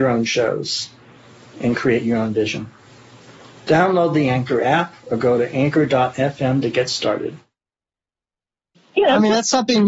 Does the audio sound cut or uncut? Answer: uncut